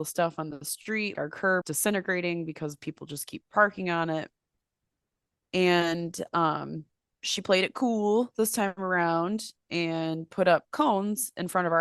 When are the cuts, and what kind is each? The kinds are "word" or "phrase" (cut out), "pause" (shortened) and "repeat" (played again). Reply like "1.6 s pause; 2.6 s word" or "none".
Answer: 1.1 s word; 1.6 s word; 7.1 s word